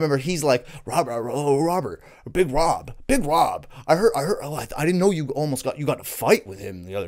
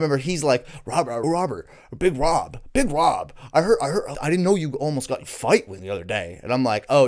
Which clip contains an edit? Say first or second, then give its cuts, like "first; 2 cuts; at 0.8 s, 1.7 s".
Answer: second; 4 cuts; at 1.2 s, 4.1 s, 5.2 s, 5.8 s